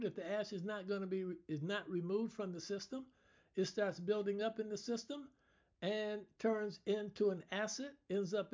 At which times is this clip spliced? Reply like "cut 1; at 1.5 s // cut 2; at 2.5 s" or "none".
none

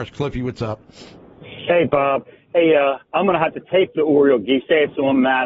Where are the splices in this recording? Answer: cut 1; at 3.0 s

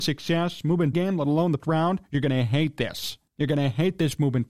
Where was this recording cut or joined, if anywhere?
cut 1; at 0.9 s // cut 2; at 1.6 s // cut 3; at 3.3 s

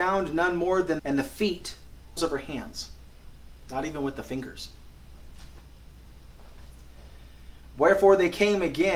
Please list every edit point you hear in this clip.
cut 1; at 1.0 s // cut 2; at 2.2 s

